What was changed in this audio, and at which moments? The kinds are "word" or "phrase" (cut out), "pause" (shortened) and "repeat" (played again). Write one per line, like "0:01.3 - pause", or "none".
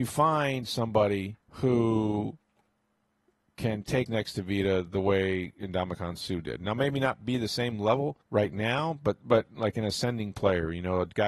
0:01.4 - pause
0:04.1 - phrase
0:08.2 - pause

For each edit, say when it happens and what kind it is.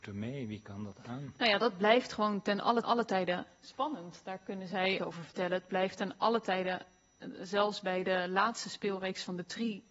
0:02.8 - repeat
0:05.0 - phrase

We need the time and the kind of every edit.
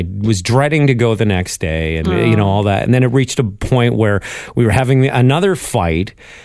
none

